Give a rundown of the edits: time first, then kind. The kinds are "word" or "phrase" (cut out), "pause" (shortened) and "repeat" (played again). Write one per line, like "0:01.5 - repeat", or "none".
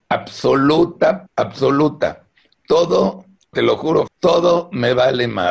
0:01.3 - word
0:03.5 - word
0:04.1 - word